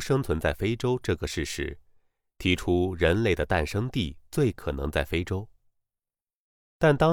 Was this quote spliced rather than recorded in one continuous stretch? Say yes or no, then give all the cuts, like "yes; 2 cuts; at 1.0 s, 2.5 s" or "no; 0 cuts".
no; 0 cuts